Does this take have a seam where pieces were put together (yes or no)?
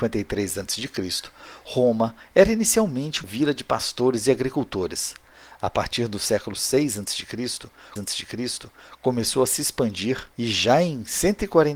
yes